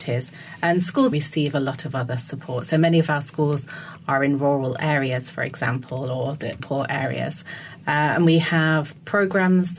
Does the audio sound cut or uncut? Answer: cut